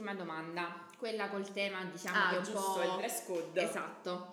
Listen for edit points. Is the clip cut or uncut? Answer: uncut